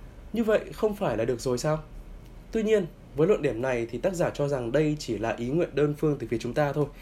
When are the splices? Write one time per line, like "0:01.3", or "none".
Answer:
none